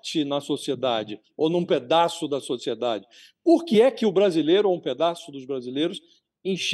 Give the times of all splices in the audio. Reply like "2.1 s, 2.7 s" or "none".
none